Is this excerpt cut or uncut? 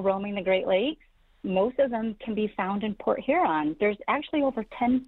uncut